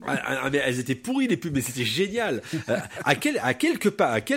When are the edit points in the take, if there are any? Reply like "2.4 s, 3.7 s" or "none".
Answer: none